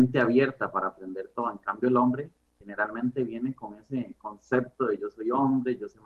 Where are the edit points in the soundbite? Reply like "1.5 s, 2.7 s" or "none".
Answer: 2.6 s